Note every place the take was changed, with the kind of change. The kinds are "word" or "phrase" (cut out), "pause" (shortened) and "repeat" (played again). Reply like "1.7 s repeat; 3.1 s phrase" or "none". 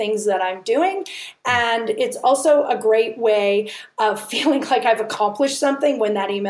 none